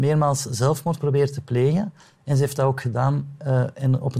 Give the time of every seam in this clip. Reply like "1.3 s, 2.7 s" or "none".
none